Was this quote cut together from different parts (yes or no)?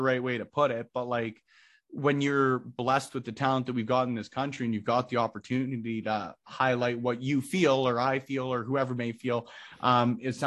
no